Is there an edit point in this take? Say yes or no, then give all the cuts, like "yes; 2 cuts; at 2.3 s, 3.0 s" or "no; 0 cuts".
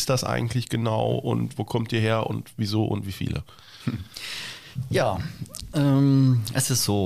no; 0 cuts